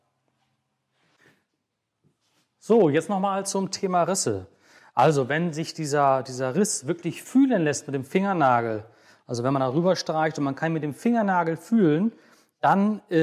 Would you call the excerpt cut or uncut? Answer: uncut